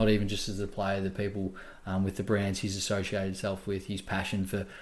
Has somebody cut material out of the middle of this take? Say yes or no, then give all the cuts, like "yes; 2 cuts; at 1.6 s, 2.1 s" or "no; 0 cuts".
no; 0 cuts